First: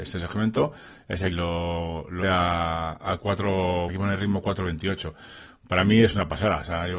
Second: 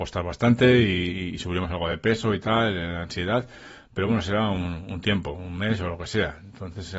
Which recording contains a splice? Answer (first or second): first